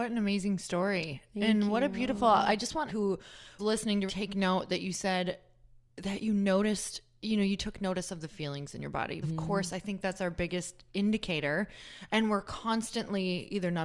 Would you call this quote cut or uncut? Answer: cut